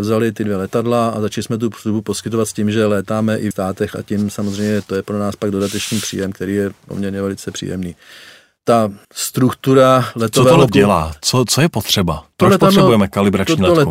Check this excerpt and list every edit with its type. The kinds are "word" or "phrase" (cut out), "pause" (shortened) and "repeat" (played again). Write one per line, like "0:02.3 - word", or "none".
0:03.5 - word
0:09.0 - pause
0:10.7 - word
0:12.3 - pause